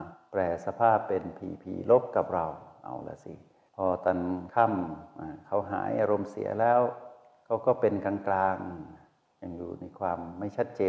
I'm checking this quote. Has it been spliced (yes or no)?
no